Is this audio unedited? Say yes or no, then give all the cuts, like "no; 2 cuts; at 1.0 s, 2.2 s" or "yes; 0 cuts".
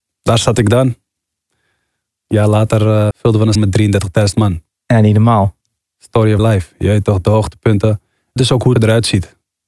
no; 6 cuts; at 3.1 s, 3.6 s, 6.4 s, 7.2 s, 8.4 s, 8.8 s